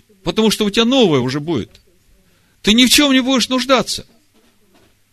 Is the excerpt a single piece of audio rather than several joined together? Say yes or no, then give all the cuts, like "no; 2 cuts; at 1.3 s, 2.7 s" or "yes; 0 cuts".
yes; 0 cuts